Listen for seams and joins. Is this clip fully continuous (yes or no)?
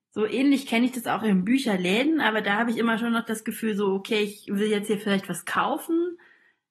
yes